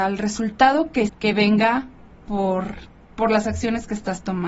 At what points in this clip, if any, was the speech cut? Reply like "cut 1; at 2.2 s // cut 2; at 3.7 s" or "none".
cut 1; at 1.1 s // cut 2; at 3.1 s